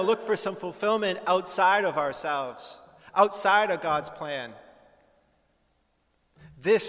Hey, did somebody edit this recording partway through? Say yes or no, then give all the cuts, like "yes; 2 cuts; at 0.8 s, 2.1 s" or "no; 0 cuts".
no; 0 cuts